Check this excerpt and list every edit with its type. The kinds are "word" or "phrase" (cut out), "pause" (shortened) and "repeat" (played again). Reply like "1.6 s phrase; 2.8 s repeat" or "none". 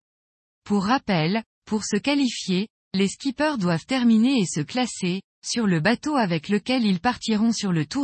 none